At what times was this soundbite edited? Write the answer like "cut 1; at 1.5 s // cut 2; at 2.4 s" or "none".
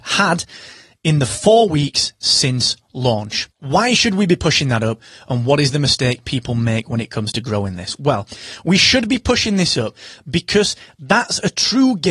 cut 1; at 3.5 s